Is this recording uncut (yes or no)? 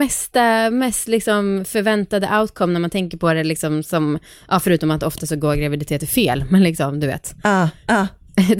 yes